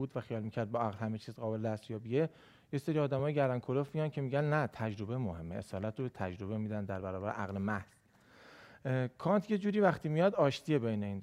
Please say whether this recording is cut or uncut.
uncut